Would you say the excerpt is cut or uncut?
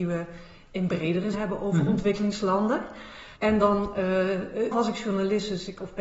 cut